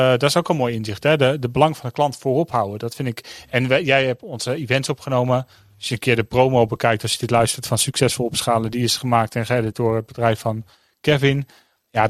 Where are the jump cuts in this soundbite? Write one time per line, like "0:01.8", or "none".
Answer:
none

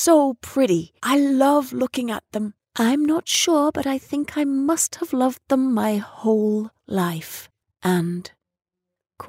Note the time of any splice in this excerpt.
0:01.0
0:07.6

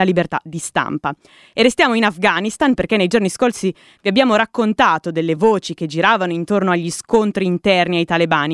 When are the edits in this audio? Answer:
none

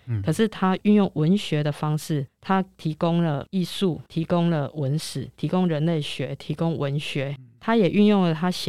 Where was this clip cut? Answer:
0:04.1

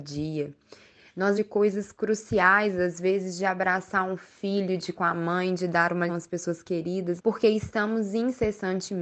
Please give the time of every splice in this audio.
0:01.4
0:05.0
0:06.1
0:07.2

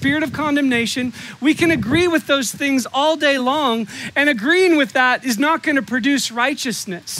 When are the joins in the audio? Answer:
none

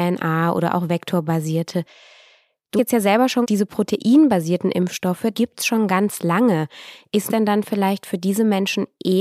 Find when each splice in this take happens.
0:02.8
0:03.4
0:05.3
0:07.3

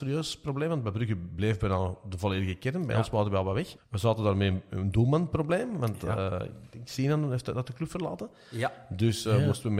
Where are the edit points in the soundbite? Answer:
0:03.8

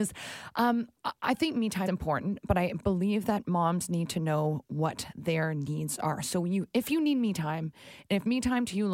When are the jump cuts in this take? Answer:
0:01.9

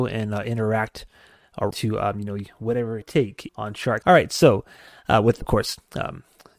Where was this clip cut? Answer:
0:01.7
0:03.0
0:03.5
0:04.0
0:05.4

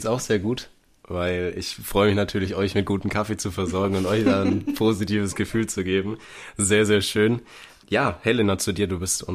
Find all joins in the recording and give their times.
none

